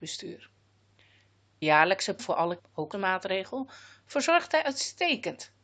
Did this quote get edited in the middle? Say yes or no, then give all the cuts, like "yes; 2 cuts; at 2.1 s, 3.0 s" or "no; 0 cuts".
yes; 4 cuts; at 1.6 s, 2.2 s, 2.6 s, 2.9 s